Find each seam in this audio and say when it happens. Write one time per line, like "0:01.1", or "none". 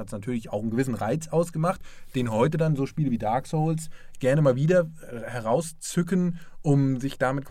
none